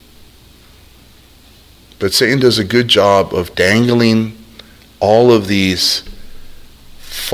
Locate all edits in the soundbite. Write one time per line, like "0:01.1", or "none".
0:03.5